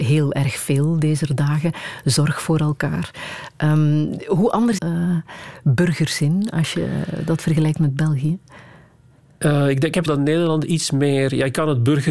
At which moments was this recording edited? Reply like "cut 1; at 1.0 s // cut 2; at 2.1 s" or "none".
cut 1; at 4.8 s // cut 2; at 10.1 s

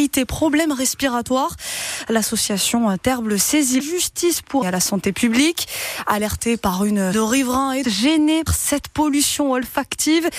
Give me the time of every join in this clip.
cut 1; at 3.8 s // cut 2; at 4.6 s // cut 3; at 7.1 s // cut 4; at 7.8 s // cut 5; at 8.5 s

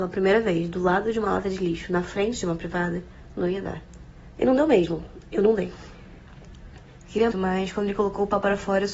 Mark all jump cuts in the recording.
cut 1; at 7.3 s

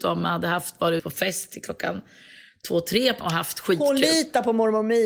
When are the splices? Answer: cut 1; at 1.0 s // cut 2; at 3.2 s

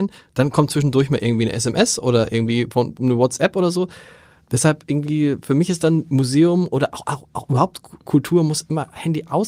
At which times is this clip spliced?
none

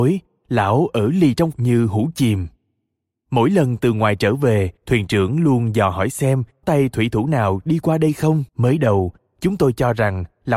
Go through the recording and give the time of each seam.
cut 1; at 1.5 s // cut 2; at 4.8 s // cut 3; at 6.6 s // cut 4; at 8.5 s

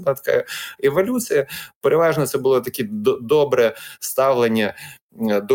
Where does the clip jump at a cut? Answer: none

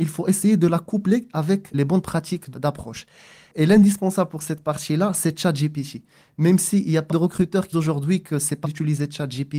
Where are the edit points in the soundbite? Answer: cut 1; at 1.7 s // cut 2; at 2.5 s // cut 3; at 7.1 s // cut 4; at 7.7 s // cut 5; at 8.6 s

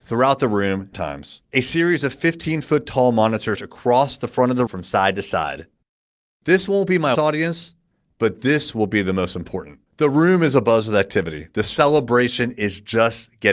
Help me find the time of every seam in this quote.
cut 1; at 0.9 s // cut 2; at 1.4 s // cut 3; at 3.6 s // cut 4; at 4.7 s // cut 5; at 7.1 s // cut 6; at 9.9 s

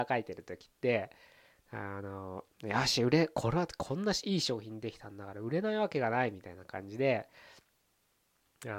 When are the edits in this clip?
none

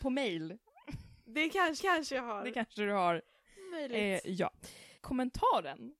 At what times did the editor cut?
cut 1; at 1.8 s

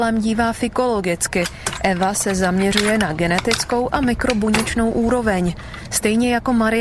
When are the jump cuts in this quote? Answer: none

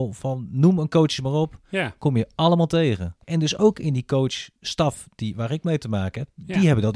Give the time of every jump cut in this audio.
cut 1; at 3.2 s // cut 2; at 4.6 s

